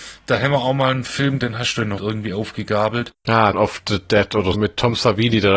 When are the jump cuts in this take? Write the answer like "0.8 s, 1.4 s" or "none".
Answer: 1.4 s, 2.0 s, 3.5 s, 4.5 s